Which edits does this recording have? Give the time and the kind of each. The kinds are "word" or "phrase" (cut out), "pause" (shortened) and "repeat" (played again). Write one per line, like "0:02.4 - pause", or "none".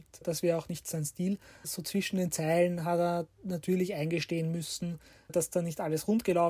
none